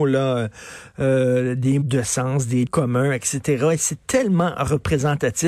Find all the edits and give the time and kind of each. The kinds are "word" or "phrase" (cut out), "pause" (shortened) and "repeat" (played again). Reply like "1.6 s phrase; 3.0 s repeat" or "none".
1.8 s phrase; 2.7 s word